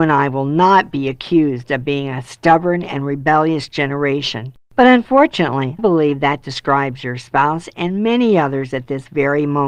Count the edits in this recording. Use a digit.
2